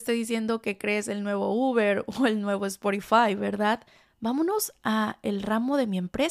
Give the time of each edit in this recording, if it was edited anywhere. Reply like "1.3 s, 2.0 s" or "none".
none